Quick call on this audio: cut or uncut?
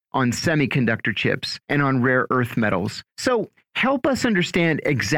cut